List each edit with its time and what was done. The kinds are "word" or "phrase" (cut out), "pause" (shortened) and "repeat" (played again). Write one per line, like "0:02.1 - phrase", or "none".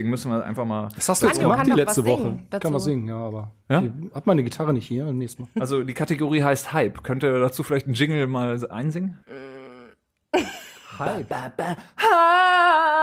0:09.2 - pause